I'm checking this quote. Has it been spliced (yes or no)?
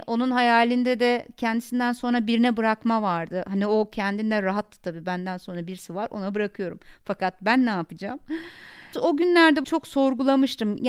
yes